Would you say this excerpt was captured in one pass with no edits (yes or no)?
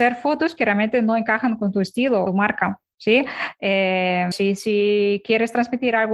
no